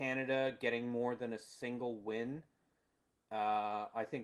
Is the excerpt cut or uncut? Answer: uncut